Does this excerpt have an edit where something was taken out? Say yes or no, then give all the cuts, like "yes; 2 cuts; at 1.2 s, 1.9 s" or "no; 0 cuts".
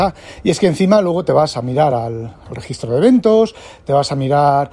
no; 0 cuts